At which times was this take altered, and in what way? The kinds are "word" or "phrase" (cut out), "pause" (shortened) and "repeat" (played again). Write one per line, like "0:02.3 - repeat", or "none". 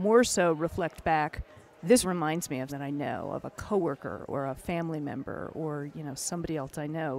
0:02.0 - word
0:02.7 - word

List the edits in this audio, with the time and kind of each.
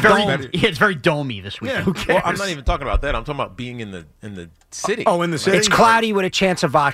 none

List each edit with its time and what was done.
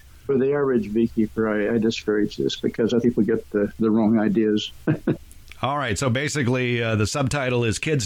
0:03.0 - word

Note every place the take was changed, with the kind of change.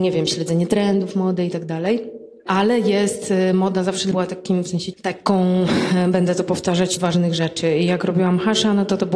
0:04.1 - word
0:04.9 - word
0:07.0 - phrase

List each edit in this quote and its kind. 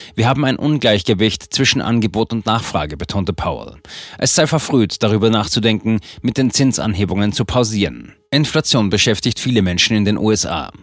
0:08.2 - pause

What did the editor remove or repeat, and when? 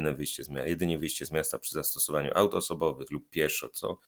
none

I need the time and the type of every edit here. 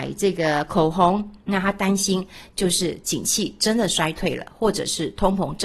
0:01.4 - pause

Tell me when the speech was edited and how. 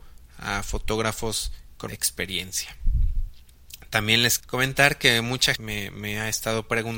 0:01.9 - word
0:04.4 - word
0:05.6 - word

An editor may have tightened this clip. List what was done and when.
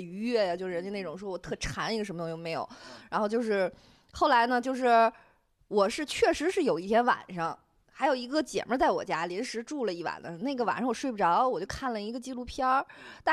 none

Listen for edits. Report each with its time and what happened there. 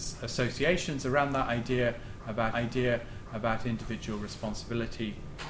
0:02.5 - repeat

